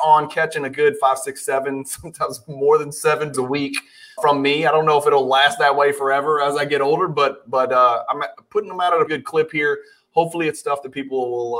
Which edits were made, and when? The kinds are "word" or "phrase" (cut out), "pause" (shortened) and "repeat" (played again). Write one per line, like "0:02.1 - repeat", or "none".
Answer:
0:03.3 - word
0:04.2 - word
0:09.1 - word